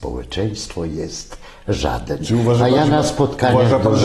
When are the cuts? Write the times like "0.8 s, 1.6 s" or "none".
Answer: none